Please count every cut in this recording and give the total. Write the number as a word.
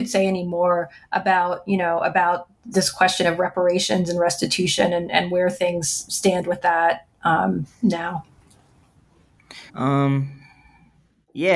one